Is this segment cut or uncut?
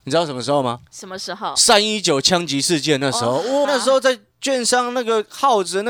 cut